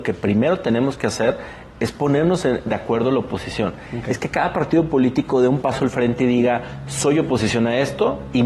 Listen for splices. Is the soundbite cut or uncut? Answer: uncut